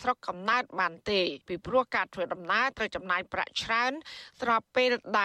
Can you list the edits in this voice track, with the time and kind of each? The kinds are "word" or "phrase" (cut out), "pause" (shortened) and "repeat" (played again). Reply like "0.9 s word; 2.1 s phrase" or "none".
1.4 s pause

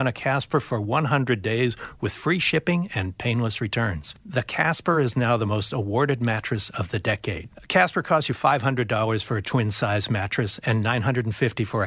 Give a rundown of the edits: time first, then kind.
none

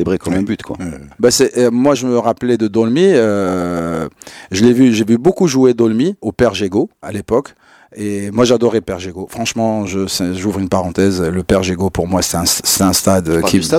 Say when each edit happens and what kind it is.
none

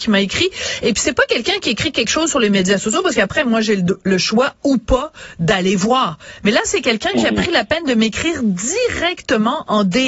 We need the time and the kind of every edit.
none

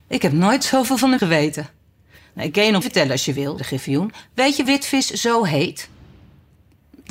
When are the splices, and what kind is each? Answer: 1.2 s word; 2.8 s word; 3.6 s word; 4.7 s word

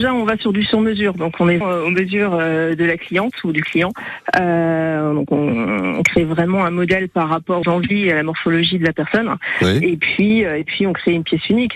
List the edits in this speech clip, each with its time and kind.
1.6 s word; 7.6 s word

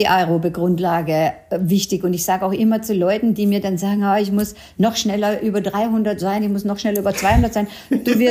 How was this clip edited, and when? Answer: none

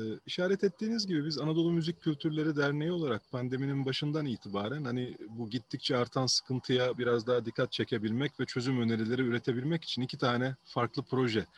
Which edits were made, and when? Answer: none

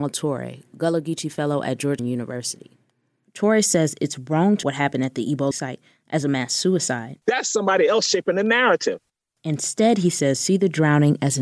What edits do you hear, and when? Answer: 2.0 s word; 4.6 s word; 5.5 s word; 7.2 s pause

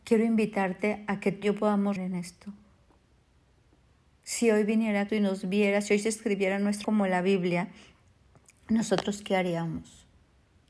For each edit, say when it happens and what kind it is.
1.4 s word; 2.0 s word; 5.1 s word; 6.8 s word

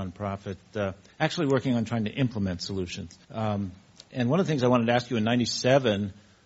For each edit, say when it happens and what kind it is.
1.1 s pause; 3.2 s pause

